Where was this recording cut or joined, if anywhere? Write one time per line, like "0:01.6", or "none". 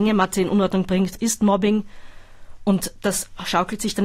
0:01.2